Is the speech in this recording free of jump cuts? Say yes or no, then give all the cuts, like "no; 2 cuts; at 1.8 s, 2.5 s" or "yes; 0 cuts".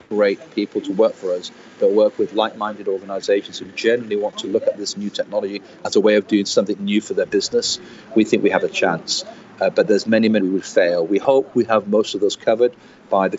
no; 1 cut; at 10.4 s